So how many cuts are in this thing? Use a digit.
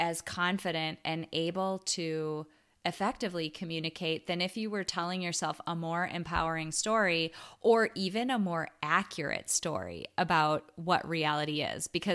0